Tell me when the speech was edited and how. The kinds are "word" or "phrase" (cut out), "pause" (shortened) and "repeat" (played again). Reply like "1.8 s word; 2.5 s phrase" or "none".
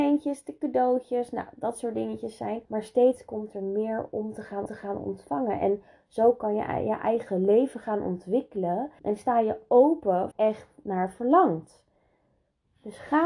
2.6 s pause; 4.7 s repeat; 9.0 s pause; 10.3 s phrase